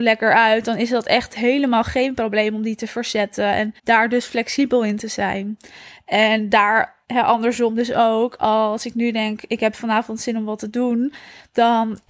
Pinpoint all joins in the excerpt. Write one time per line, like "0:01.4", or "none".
0:03.8
0:07.0